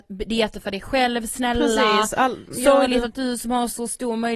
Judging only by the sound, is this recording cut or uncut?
uncut